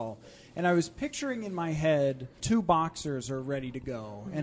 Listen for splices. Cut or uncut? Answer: cut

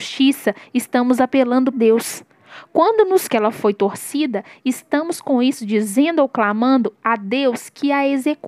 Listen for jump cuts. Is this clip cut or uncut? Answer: cut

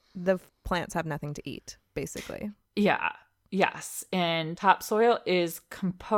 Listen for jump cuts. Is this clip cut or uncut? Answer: uncut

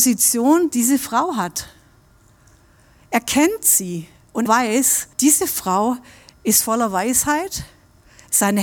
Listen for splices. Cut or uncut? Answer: cut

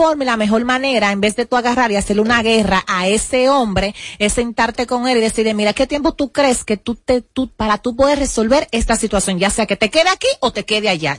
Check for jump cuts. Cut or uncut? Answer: cut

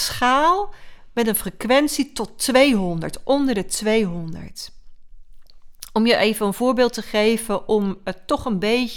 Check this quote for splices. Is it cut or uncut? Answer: uncut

